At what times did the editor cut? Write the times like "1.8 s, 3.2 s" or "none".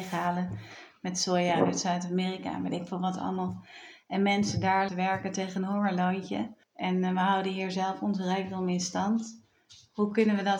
4.9 s, 6.6 s